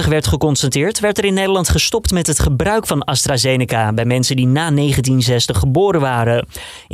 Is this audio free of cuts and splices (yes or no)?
yes